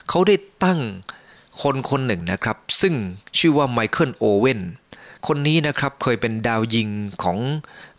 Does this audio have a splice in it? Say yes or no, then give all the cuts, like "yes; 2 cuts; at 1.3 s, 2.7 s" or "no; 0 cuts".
yes; 2 cuts; at 3.3 s, 5.2 s